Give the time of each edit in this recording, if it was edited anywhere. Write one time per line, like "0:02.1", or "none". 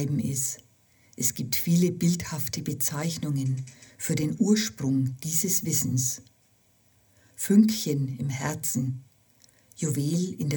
none